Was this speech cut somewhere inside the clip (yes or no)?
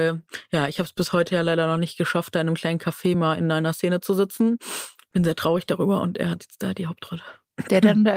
no